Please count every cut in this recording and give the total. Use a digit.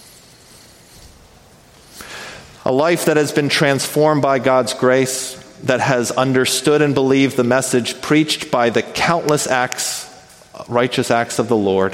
0